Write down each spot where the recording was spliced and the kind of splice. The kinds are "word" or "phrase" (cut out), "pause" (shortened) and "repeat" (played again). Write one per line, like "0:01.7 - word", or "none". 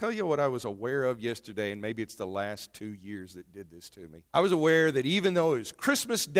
0:04.3 - pause